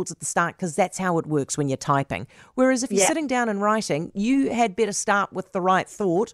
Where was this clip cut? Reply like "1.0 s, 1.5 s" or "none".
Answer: none